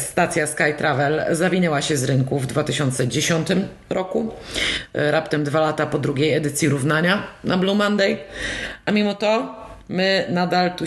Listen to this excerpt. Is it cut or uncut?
uncut